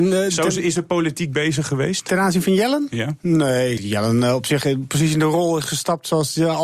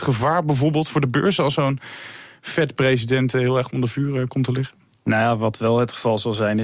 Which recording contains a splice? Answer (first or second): first